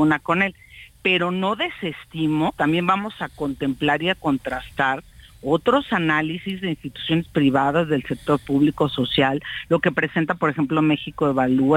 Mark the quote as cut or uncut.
uncut